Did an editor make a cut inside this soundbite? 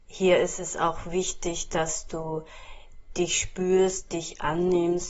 no; 0 cuts

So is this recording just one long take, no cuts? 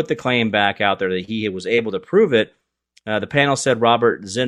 yes; 0 cuts

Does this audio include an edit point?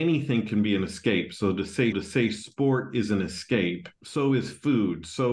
yes; 2 cuts; at 1.9 s, 4.0 s

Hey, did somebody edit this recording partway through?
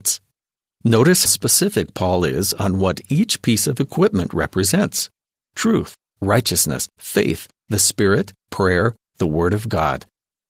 yes; 1 cut; at 1.3 s

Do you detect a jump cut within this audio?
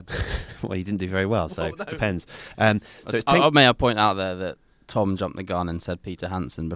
no; 0 cuts

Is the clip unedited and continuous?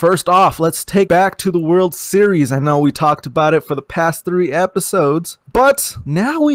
no; 2 cuts; at 1.1 s, 5.4 s

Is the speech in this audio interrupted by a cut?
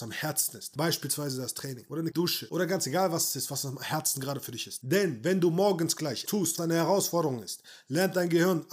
yes; 3 cuts; at 2.1 s, 6.3 s, 6.6 s

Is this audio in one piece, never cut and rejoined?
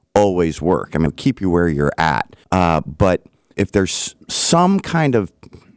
no; 3 cuts; at 1.1 s, 2.4 s, 3.5 s

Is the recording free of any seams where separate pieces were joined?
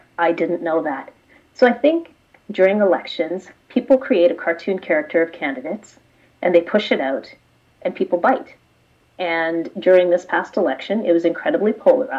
yes; 0 cuts

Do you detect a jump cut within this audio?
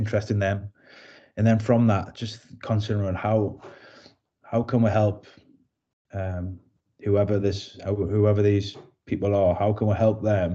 no; 0 cuts

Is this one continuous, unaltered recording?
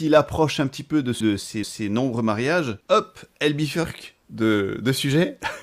no; 4 cuts; at 1.2 s, 1.6 s, 2.8 s, 4.2 s

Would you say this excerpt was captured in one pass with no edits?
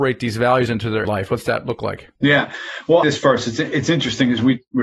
no; 3 cuts; at 1.0 s, 2.2 s, 3.0 s

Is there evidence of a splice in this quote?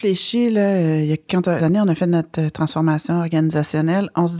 yes; 1 cut; at 1.6 s

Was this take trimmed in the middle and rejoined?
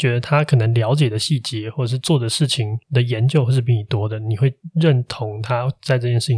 yes; 1 cut; at 2.8 s

